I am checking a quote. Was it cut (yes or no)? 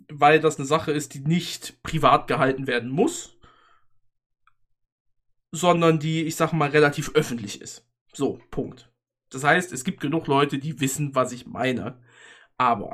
no